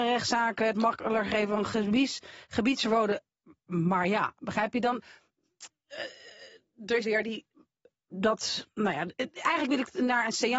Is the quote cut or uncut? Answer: cut